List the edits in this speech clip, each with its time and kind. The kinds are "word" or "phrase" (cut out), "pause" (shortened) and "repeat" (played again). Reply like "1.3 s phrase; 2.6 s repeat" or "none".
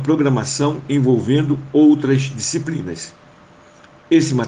none

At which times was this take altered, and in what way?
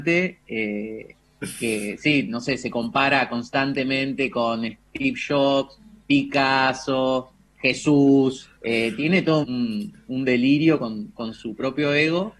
8.6 s pause; 9.4 s word

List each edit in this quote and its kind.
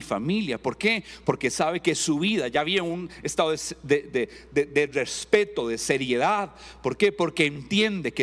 none

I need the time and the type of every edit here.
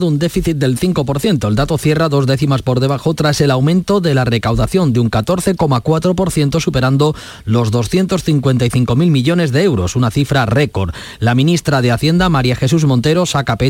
none

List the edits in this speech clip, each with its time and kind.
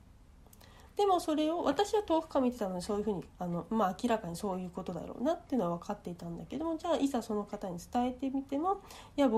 3.3 s pause

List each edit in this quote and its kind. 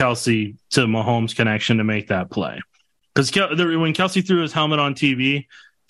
none

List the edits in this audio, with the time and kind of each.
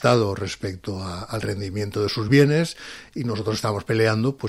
none

